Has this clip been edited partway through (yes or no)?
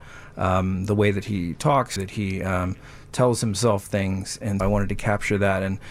yes